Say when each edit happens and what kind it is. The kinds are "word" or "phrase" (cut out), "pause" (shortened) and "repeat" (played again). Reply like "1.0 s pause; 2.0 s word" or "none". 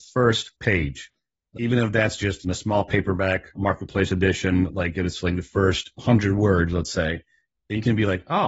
none